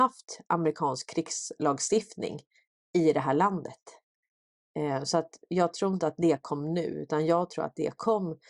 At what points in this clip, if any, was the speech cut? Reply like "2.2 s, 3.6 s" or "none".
none